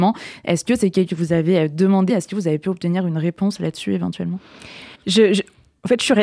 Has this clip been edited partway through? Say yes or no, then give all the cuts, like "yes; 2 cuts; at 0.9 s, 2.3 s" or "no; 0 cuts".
yes; 3 cuts; at 1.1 s, 2.1 s, 4.9 s